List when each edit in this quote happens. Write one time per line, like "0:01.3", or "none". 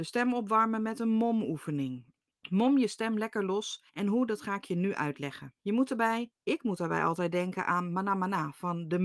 0:02.3
0:03.9
0:05.6